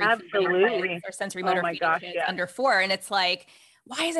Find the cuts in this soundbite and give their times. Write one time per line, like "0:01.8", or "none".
none